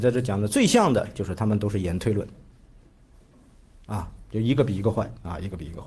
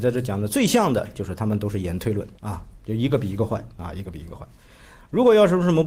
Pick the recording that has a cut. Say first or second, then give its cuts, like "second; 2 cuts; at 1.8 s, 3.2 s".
second; 1 cut; at 2.4 s